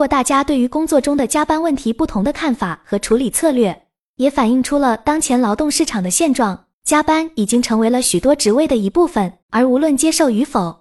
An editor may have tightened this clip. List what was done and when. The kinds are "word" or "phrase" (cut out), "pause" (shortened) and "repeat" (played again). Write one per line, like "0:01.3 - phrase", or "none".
0:06.7 - pause
0:09.4 - pause